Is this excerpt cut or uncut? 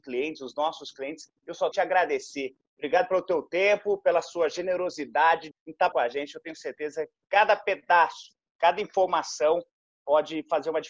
cut